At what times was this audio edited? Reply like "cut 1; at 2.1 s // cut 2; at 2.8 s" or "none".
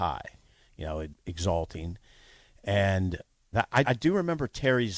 cut 1; at 1.1 s // cut 2; at 3.5 s // cut 3; at 3.8 s